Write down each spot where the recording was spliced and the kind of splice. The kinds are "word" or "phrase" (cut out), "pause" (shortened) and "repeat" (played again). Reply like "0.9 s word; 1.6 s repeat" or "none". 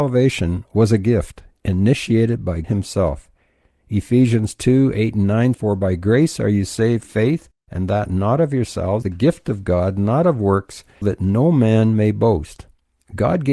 2.6 s word; 5.5 s word; 7.0 s word; 7.6 s pause; 9.0 s phrase; 11.0 s word